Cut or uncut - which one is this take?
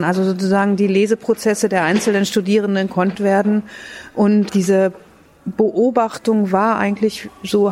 cut